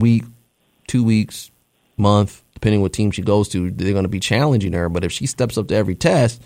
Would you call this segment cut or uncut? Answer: uncut